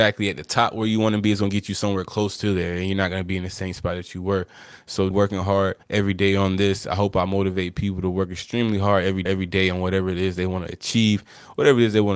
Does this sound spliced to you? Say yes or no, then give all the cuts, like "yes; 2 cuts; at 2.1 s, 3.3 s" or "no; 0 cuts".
yes; 3 cuts; at 5.1 s, 5.8 s, 9.3 s